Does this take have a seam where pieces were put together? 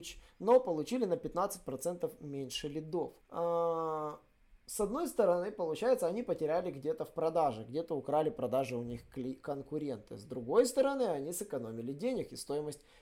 yes; 1 cut; at 3.2 s

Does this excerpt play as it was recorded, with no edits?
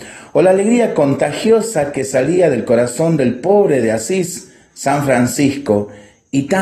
yes; 0 cuts

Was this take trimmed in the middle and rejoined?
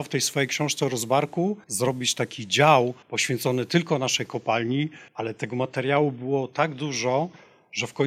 yes; 3 cuts; at 1.6 s, 3.0 s, 5.1 s

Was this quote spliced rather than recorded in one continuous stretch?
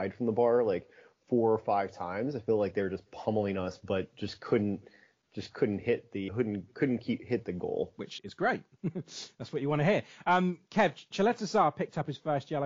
yes; 2 cuts; at 6.3 s, 8.2 s

